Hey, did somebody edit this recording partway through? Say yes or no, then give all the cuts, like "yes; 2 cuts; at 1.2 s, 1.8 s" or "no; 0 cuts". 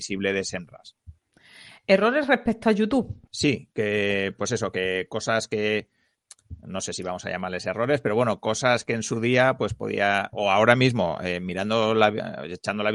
yes; 1 cut; at 3.3 s